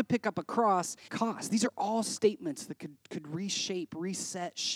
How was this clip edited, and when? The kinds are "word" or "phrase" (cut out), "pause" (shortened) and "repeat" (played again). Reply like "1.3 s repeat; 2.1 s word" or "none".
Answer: 1.1 s phrase